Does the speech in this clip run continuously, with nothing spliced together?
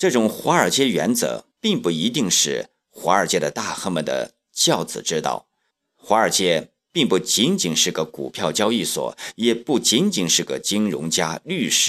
no; 2 cuts; at 1.5 s, 5.7 s

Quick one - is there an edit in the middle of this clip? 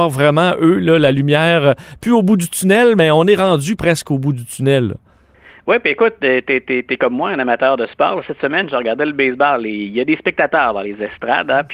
no; 0 cuts

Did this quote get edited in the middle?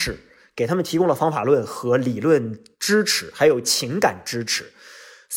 yes; 1 cut; at 2.7 s

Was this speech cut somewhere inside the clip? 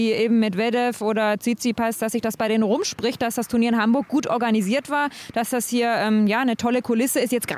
no; 0 cuts

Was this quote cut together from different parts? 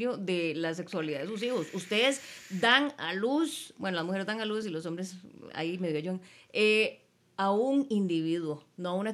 no; 0 cuts

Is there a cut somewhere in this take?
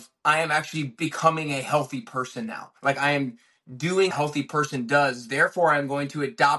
yes; 2 cuts; at 2.8 s, 4.1 s

